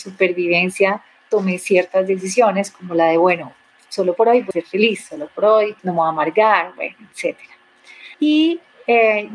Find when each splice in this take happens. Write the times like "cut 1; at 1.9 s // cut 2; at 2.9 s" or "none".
cut 1; at 4.5 s // cut 2; at 5.8 s // cut 3; at 8.1 s